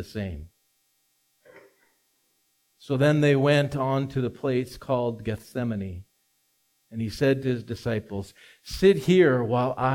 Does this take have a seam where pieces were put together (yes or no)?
no